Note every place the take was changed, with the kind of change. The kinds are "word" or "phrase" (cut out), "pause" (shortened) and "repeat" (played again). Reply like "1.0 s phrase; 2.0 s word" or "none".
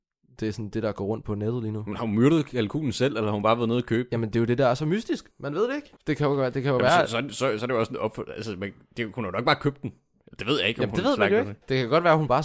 5.3 s pause; 6.0 s pause